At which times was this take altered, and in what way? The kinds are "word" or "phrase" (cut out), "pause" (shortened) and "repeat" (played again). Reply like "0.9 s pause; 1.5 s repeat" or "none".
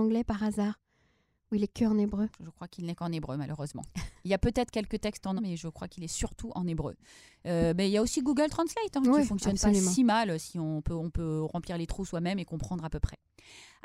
2.3 s pause; 5.4 s word